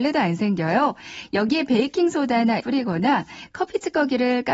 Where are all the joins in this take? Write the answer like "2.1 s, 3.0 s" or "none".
2.6 s